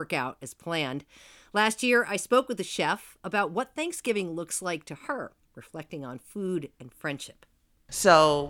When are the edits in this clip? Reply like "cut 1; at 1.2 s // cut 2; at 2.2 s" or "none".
none